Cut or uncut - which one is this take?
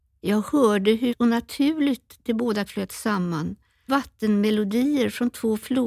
cut